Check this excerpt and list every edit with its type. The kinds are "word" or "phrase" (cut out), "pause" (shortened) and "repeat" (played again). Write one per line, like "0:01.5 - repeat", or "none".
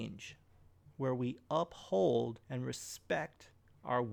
0:02.4 - pause

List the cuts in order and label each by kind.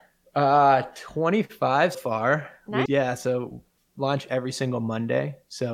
0:01.9 - word
0:02.9 - word

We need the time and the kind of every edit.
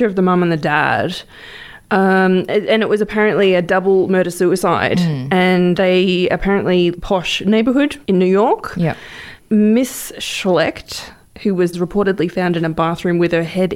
0:05.8 - word
0:06.9 - phrase
0:08.0 - pause
0:11.7 - phrase

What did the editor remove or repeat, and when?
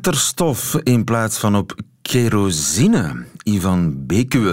none

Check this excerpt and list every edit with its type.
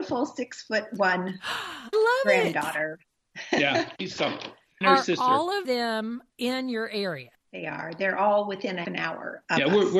0:01.9 - word
0:04.8 - word
0:05.6 - word
0:08.8 - word

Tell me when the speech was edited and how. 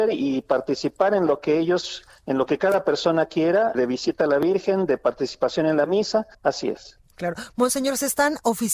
0:03.7 - word
0:06.3 - pause

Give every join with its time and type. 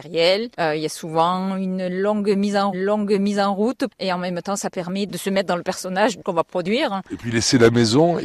0:02.7 - repeat

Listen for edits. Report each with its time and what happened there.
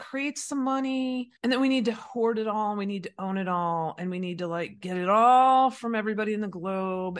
0:01.4 - pause

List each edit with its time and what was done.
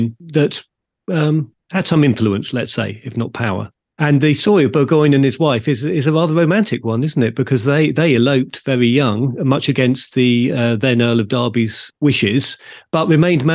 none

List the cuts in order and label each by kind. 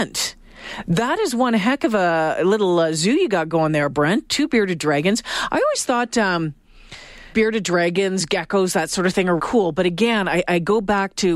0:07.3 - word
0:09.4 - word

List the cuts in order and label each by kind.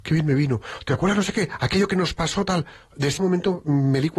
0:03.2 - word

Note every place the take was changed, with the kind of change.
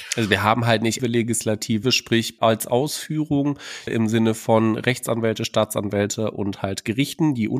0:01.0 - word
0:01.8 - word
0:02.4 - word
0:03.9 - word

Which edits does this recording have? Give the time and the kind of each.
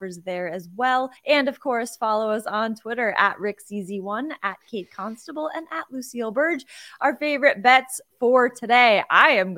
0:01.2 - pause

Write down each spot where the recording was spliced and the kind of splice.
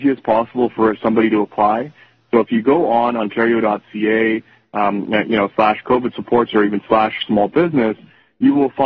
none

